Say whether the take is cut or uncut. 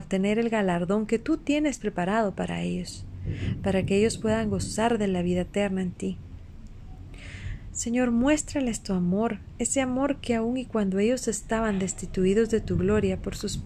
uncut